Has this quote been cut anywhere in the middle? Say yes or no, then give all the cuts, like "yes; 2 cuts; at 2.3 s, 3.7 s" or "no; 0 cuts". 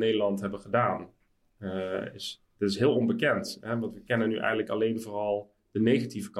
no; 0 cuts